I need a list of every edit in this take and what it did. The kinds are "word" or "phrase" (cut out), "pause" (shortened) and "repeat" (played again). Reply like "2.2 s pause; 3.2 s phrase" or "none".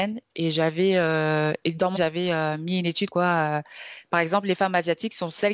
2.0 s word; 3.1 s word